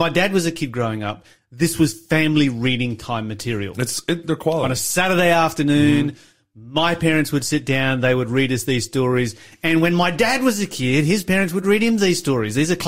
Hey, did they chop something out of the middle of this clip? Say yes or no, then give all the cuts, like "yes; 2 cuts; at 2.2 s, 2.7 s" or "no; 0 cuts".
no; 0 cuts